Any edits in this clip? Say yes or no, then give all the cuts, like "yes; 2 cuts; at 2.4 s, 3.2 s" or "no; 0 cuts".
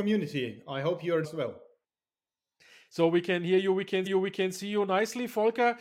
yes; 2 cuts; at 1.2 s, 4.1 s